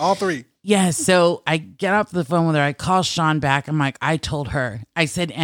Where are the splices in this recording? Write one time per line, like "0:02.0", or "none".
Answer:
none